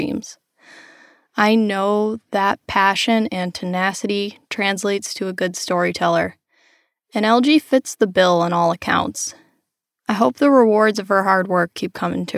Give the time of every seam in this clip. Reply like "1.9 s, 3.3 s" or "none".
none